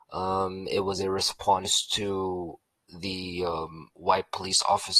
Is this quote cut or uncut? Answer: cut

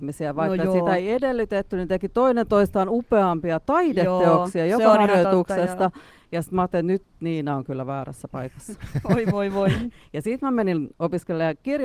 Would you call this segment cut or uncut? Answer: uncut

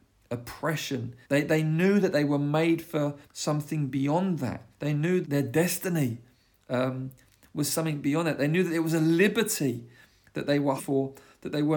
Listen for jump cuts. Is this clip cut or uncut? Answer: cut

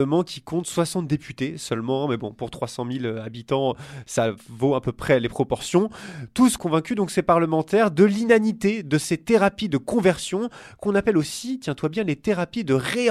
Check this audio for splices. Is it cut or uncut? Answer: cut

